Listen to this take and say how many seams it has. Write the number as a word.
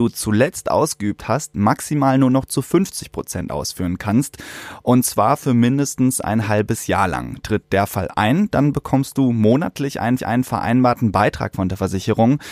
one